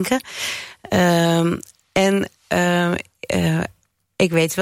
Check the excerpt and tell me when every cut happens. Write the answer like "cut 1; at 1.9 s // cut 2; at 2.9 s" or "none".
cut 1; at 2.4 s